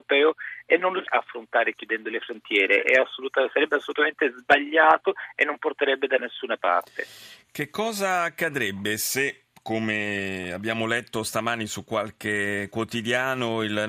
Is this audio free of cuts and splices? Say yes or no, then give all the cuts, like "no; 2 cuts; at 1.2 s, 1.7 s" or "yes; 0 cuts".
no; 1 cut; at 1.1 s